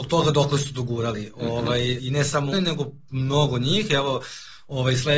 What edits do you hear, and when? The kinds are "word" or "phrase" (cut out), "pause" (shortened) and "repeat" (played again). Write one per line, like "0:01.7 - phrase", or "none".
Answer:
0:02.0 - word
0:02.5 - word